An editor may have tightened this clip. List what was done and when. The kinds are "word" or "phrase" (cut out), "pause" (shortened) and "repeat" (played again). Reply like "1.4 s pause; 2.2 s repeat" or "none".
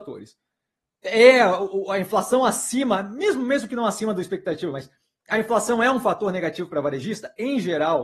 none